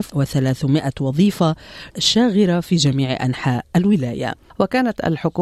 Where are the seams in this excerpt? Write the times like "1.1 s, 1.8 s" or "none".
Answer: 1.9 s